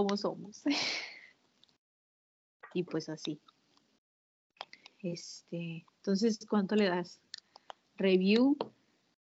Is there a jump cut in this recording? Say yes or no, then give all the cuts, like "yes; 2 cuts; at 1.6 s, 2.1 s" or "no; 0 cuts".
no; 0 cuts